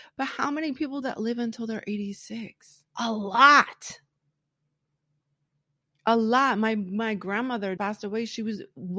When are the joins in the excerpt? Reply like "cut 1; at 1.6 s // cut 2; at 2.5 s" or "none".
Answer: cut 1; at 1.0 s // cut 2; at 2.9 s // cut 3; at 7.8 s